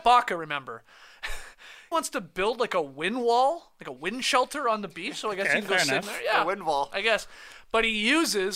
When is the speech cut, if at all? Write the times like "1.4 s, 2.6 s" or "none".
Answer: 1.9 s, 6.0 s